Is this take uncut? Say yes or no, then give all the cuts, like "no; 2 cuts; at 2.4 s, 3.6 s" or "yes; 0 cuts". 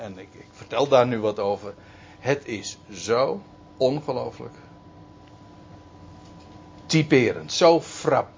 yes; 0 cuts